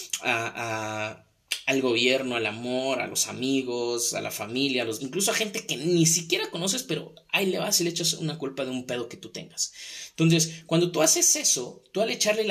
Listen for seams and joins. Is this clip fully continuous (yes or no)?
no